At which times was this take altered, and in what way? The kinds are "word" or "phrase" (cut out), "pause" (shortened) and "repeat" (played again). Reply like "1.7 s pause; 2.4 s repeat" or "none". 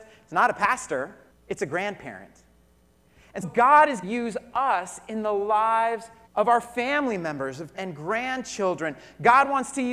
1.3 s pause; 3.4 s word; 4.0 s word; 6.3 s pause; 7.7 s word